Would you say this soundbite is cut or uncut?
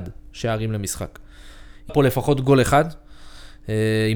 cut